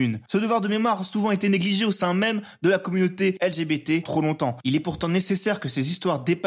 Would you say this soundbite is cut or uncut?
cut